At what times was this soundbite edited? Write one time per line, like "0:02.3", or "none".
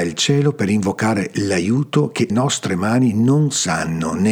0:02.3